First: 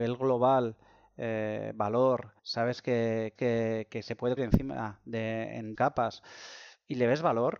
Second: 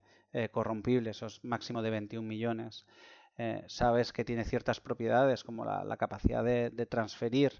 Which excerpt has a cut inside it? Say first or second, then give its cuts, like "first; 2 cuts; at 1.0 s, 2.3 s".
first; 4 cuts; at 2.4 s, 3.4 s, 4.4 s, 5.7 s